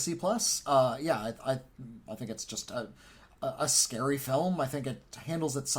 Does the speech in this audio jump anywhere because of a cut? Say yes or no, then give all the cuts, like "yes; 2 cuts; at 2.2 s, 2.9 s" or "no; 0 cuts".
no; 0 cuts